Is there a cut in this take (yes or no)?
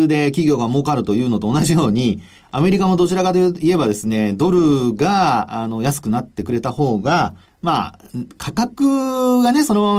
yes